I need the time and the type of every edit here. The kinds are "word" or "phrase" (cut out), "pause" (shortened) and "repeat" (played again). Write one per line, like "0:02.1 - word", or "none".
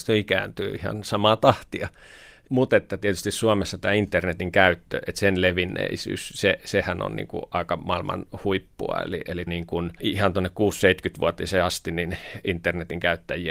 0:09.5 - word